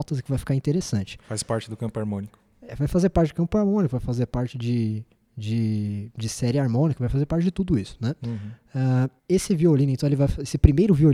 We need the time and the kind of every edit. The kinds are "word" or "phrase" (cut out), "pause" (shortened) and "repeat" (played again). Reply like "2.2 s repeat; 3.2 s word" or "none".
9.2 s pause